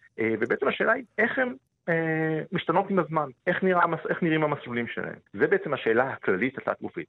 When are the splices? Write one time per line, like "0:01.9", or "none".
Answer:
0:01.1
0:03.4
0:05.3